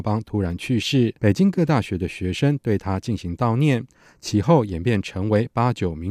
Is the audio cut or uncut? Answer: cut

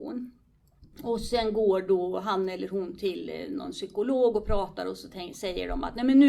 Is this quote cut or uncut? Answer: uncut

